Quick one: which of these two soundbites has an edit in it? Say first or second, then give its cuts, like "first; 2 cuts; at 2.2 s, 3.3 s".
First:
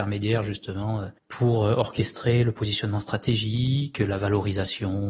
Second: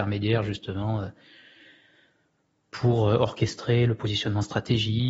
first; 1 cut; at 1.2 s